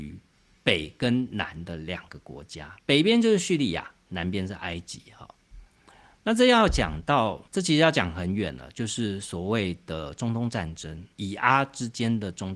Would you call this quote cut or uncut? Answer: cut